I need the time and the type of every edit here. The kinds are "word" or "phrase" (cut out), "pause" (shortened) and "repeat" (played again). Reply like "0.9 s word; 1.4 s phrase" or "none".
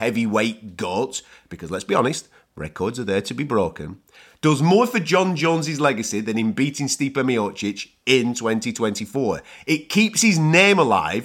none